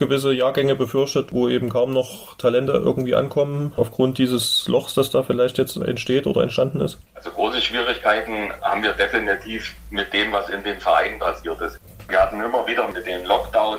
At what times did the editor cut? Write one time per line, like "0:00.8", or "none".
0:07.0